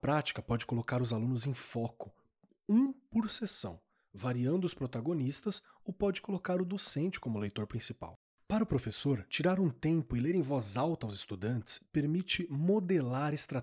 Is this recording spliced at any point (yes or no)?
no